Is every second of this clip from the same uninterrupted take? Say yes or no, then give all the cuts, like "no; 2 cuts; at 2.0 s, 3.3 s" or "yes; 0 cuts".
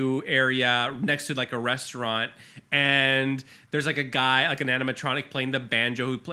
yes; 0 cuts